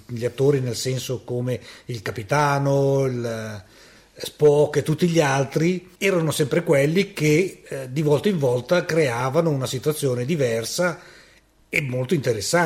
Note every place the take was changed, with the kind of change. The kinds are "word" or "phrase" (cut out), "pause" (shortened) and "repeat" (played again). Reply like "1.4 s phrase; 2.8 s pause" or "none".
6.0 s pause

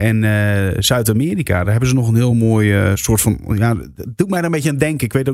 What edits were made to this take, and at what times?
none

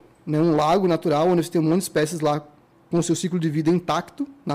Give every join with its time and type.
none

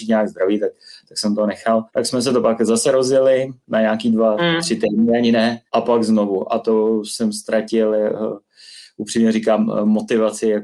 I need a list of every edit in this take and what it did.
1.9 s pause; 5.7 s pause

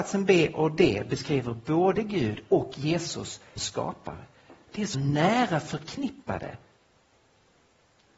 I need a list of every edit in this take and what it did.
3.6 s word; 4.9 s word

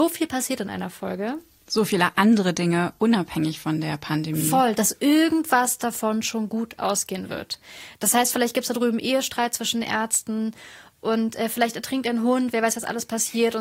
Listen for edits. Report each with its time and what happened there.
none

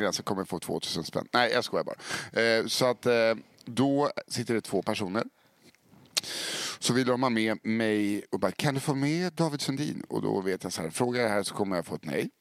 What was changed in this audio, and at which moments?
none

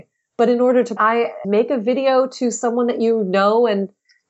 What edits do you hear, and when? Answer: 1.0 s phrase; 1.4 s phrase

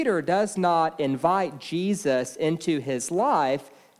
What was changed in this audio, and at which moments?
none

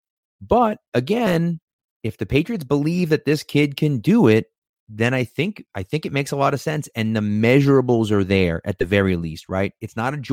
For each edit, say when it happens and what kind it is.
none

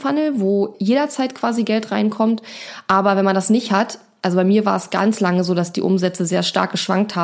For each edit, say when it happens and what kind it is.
none

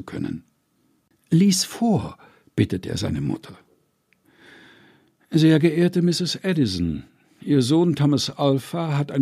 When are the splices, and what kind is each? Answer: none

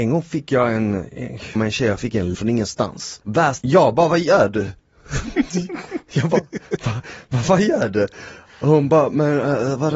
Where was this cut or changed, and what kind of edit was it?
1.6 s word; 2.3 s word; 3.6 s word

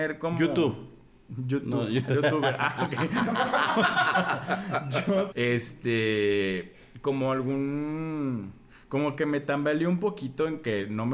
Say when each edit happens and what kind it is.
5.3 s word

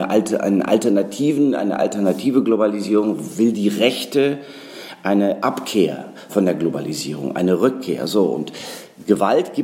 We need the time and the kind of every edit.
6.3 s word

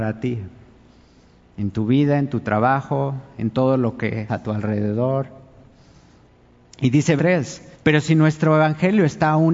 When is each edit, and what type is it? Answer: 4.3 s word; 7.2 s word; 7.7 s pause

